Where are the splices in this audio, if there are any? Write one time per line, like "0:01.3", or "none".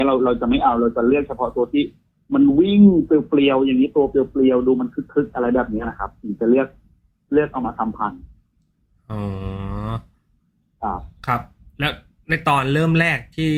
none